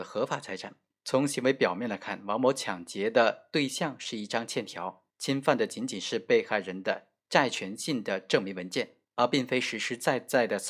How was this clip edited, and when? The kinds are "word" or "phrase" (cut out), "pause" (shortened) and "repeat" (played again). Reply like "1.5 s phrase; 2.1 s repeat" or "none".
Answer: 5.1 s pause; 9.0 s pause